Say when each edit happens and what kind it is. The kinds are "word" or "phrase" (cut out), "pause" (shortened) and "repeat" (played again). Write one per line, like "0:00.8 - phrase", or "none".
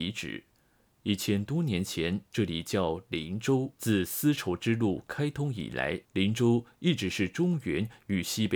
0:02.3 - pause
0:03.7 - pause
0:06.0 - pause